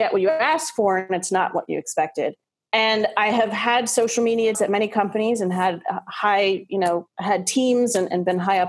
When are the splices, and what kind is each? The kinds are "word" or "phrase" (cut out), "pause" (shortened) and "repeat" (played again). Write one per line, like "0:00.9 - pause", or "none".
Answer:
0:04.5 - word